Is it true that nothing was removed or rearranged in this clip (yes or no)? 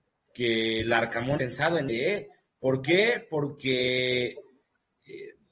no